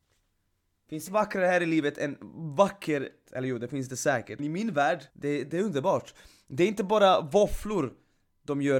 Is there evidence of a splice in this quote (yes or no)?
yes